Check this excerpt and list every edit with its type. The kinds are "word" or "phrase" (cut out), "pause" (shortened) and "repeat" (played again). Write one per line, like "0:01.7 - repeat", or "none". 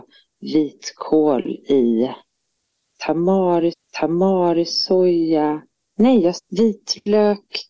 0:03.7 - repeat
0:06.4 - word